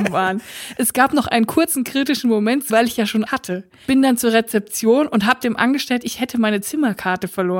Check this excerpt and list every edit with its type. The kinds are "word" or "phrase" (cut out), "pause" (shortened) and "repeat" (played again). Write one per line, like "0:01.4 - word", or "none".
0:02.7 - word
0:03.3 - word
0:06.0 - word

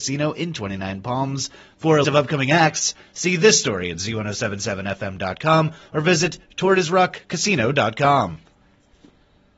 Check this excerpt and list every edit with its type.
0:02.0 - word

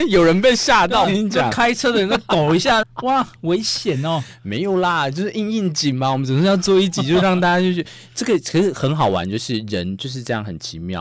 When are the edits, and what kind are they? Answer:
0:01.0 - word
0:02.8 - word

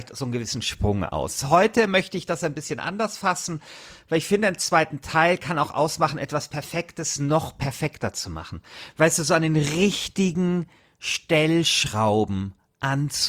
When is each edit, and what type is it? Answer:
none

